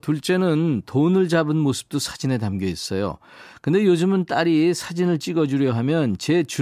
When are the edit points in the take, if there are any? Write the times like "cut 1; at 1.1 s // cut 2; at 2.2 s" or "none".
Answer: none